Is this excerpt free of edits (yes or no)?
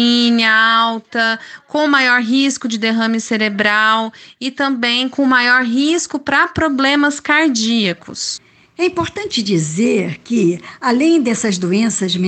yes